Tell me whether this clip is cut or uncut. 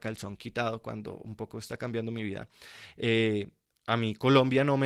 uncut